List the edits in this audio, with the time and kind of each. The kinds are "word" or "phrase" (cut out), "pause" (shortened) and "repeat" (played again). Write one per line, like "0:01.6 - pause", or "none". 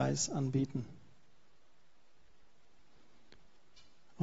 none